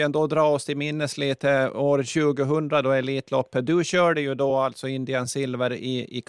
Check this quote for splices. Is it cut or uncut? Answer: uncut